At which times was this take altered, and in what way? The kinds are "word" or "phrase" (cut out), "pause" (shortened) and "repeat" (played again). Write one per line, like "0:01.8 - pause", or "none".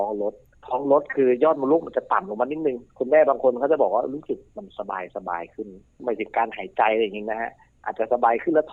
0:02.9 - pause